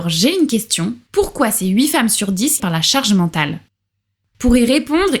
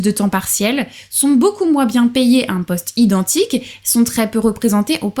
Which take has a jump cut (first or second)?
first